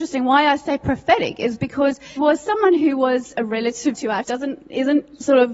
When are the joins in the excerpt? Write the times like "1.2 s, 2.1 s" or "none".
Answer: 2.2 s, 3.9 s, 4.2 s